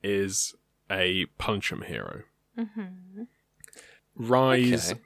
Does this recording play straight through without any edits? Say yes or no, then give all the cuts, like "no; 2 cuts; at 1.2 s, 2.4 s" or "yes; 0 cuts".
yes; 0 cuts